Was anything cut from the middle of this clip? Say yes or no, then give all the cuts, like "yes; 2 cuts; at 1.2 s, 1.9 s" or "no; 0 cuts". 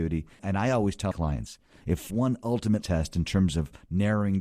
yes; 3 cuts; at 1.1 s, 2.1 s, 2.8 s